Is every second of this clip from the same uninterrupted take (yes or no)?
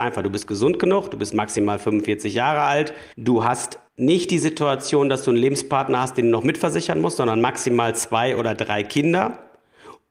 no